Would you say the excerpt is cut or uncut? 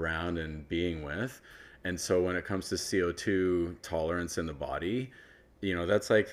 uncut